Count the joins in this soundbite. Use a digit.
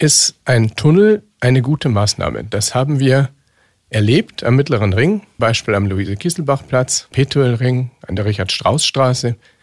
2